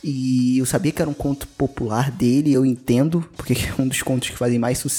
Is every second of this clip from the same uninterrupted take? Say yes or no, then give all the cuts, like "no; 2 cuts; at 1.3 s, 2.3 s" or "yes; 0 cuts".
yes; 0 cuts